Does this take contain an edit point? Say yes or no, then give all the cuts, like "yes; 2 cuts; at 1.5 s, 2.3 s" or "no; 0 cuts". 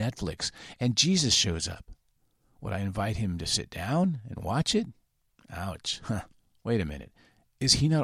no; 0 cuts